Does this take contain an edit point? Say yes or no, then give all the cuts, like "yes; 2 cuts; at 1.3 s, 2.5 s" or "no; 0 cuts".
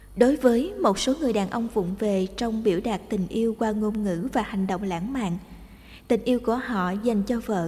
no; 0 cuts